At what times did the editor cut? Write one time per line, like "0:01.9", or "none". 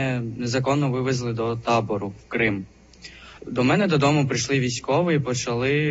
0:03.4

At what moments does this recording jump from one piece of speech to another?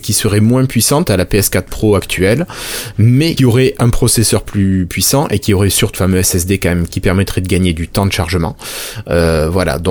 0:01.0
0:03.4
0:05.9

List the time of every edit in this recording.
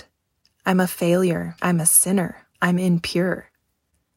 0:01.6
0:02.5

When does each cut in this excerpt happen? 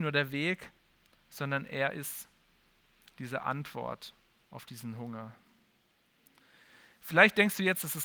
none

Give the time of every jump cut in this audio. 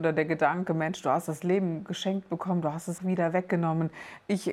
0:03.0

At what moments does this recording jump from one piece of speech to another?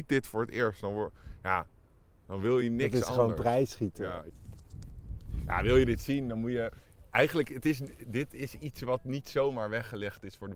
none

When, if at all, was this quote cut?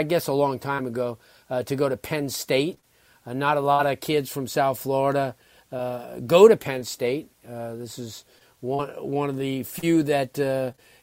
none

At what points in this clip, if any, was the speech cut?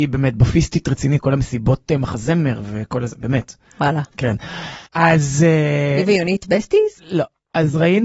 0:01.2
0:04.9
0:07.0

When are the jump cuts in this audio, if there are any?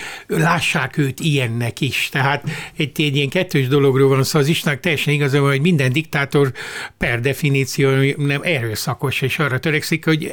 none

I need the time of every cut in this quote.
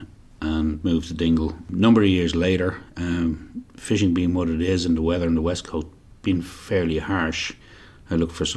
none

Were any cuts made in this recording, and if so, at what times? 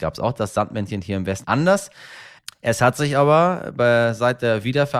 0:01.4

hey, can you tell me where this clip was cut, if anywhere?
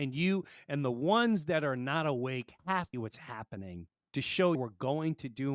0:02.6
0:02.9
0:04.0
0:04.5

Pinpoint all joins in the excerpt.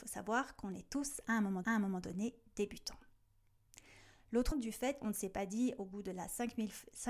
0:01.6
0:04.5
0:05.0

